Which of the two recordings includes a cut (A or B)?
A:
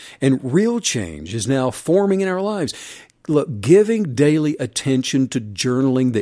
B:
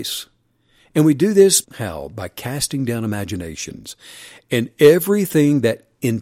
B